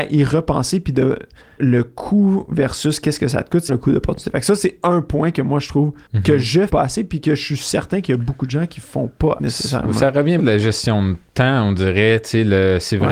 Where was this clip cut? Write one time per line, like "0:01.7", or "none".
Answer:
0:01.6
0:03.7
0:06.1
0:06.7
0:09.4
0:10.4